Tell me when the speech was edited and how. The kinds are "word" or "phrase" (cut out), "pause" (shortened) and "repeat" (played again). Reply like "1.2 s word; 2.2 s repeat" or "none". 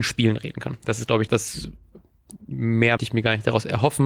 1.3 s word; 3.0 s word